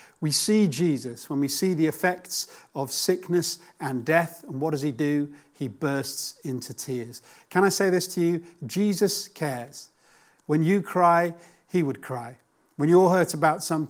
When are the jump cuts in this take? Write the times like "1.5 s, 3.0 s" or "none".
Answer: none

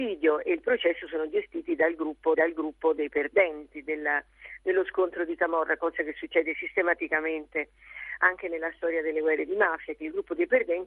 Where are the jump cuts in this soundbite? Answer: 2.3 s

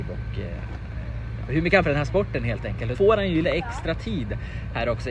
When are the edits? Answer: 1.5 s, 1.8 s, 2.9 s, 3.4 s

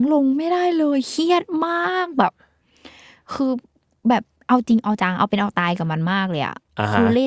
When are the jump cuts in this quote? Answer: none

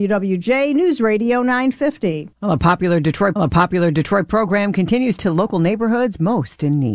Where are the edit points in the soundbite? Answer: 2.3 s, 3.4 s, 5.2 s

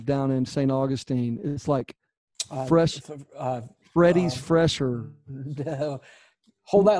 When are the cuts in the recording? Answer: none

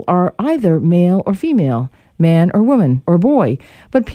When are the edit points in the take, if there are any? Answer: 3.0 s

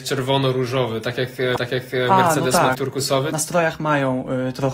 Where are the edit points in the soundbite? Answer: 1.6 s, 2.7 s

